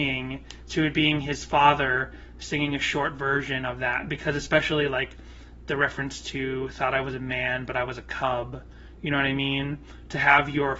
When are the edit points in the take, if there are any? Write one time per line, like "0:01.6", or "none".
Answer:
none